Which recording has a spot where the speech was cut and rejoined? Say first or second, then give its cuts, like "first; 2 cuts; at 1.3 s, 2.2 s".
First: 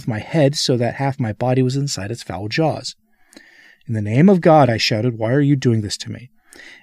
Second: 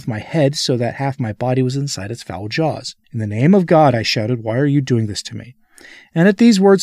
second; 1 cut; at 3.0 s